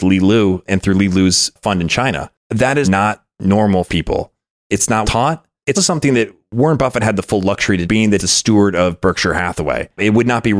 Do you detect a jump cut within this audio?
yes; 7 cuts; at 2.8 s, 3.9 s, 5.0 s, 5.7 s, 7.0 s, 7.8 s, 8.2 s

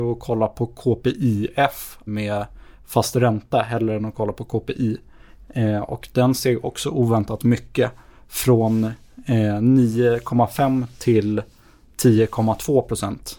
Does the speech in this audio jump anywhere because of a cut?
yes; 1 cut; at 2.1 s

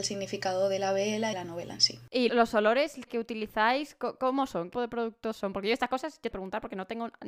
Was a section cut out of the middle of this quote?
yes; 5 cuts; at 1.3 s, 2.3 s, 3.1 s, 4.7 s, 6.3 s

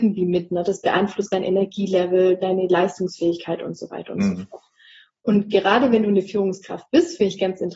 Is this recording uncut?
no; 1 cut; at 2.4 s

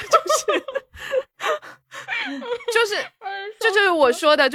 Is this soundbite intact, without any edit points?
yes; 0 cuts

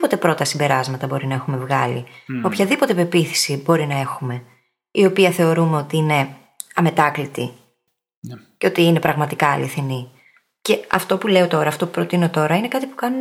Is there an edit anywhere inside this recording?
no; 0 cuts

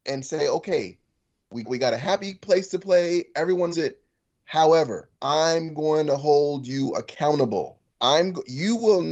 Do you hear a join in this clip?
yes; 4 cuts; at 1.6 s, 3.7 s, 5.1 s, 7.9 s

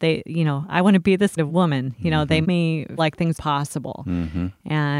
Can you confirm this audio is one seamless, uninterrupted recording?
no; 4 cuts; at 1.4 s, 2.4 s, 3.0 s, 3.3 s

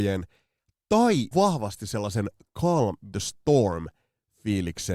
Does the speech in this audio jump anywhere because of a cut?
yes; 2 cuts; at 1.3 s, 3.1 s

